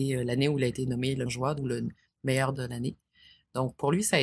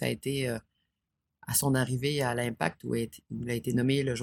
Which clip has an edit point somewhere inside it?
first; 3 cuts; at 1.3 s, 1.6 s, 2.5 s

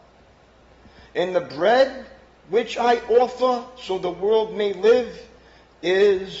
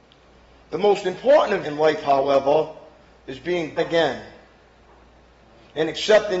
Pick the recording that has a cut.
second; 2 cuts; at 1.6 s, 3.8 s

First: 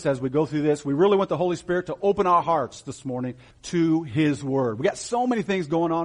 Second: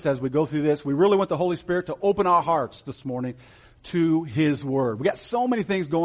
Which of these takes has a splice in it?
first; 1 cut; at 3.5 s

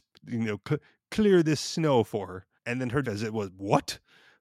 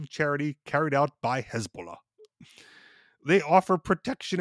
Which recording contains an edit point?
first; 2 cuts; at 2.6 s, 3.0 s

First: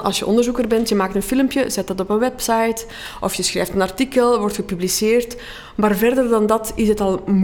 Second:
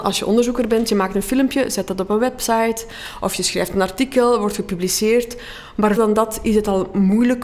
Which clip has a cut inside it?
second; 1 cut; at 6.0 s

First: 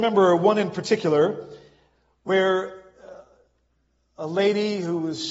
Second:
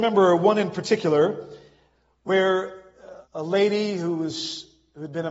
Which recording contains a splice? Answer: second; 1 cut; at 3.3 s

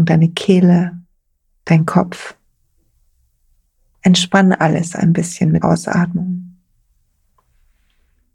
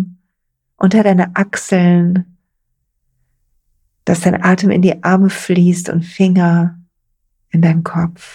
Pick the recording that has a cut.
first; 1 cut; at 5.6 s

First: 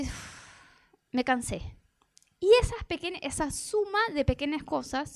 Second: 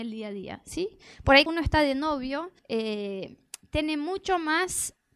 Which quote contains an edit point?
second; 2 cuts; at 1.5 s, 2.6 s

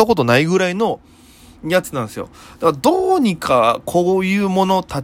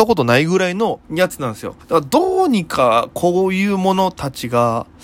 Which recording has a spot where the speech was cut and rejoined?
second; 2 cuts; at 1.0 s, 1.8 s

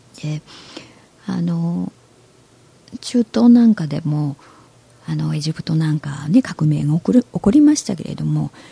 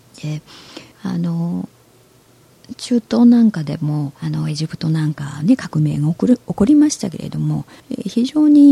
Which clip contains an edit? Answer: second; 3 cuts; at 0.9 s, 4.2 s, 7.8 s

